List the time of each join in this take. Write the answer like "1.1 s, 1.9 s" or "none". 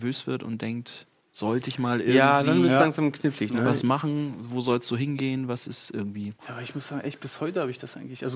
6.4 s